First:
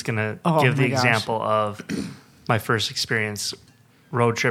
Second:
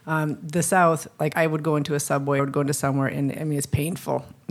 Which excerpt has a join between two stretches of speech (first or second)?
second